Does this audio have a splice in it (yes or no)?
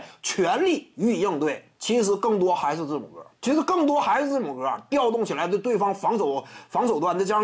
yes